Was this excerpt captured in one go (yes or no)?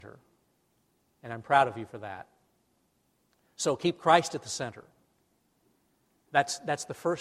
yes